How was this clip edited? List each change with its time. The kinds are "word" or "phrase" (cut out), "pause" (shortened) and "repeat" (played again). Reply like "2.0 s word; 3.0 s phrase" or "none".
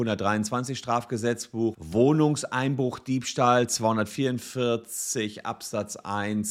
1.7 s word